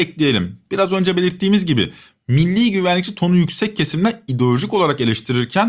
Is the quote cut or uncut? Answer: uncut